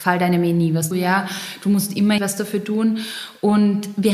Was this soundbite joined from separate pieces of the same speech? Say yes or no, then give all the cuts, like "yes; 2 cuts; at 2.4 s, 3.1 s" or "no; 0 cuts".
yes; 2 cuts; at 0.9 s, 2.2 s